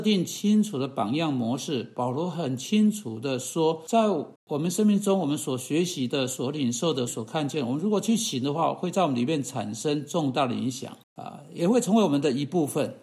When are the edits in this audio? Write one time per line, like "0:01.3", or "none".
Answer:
0:04.4
0:07.1
0:11.0